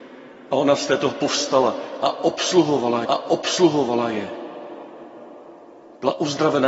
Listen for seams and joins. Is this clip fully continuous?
no; 2 cuts; at 1.1 s, 3.0 s

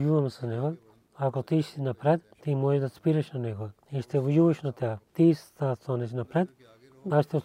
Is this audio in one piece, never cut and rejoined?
no; 4 cuts; at 0.9 s, 2.3 s, 3.8 s, 5.0 s

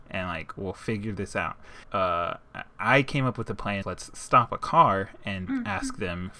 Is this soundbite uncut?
no; 3 cuts; at 1.8 s, 3.8 s, 5.5 s

